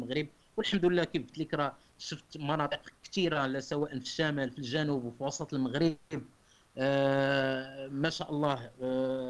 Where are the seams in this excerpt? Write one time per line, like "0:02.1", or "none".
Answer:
none